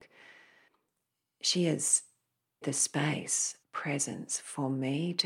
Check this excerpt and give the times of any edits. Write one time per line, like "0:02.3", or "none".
0:02.6
0:03.6